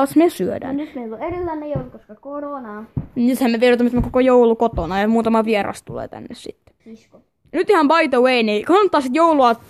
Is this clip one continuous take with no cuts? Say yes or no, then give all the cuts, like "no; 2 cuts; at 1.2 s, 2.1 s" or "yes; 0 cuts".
no; 1 cut; at 6.8 s